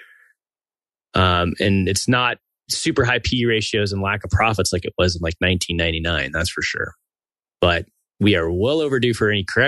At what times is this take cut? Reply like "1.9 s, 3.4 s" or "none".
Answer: none